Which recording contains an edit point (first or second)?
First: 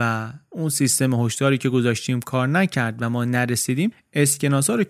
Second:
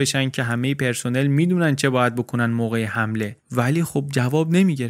second